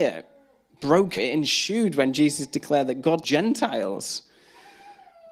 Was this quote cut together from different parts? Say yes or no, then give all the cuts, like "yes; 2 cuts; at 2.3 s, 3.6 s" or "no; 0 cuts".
yes; 2 cuts; at 1.2 s, 3.2 s